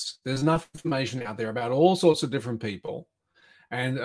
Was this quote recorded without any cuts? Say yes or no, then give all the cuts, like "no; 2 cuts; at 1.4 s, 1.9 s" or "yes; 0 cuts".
yes; 0 cuts